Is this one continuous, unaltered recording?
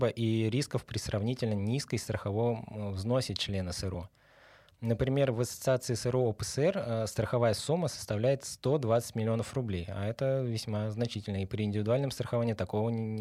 yes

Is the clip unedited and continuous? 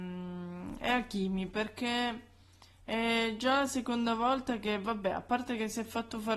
yes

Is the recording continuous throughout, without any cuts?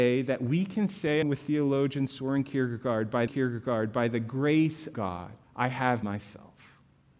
no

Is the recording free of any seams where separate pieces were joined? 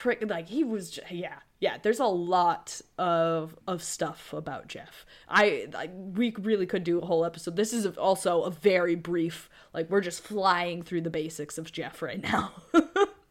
no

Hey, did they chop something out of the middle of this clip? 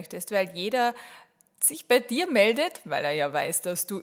no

